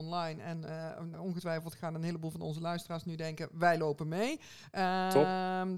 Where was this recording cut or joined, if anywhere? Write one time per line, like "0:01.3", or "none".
0:01.1